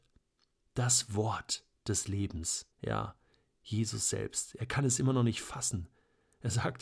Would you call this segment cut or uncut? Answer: cut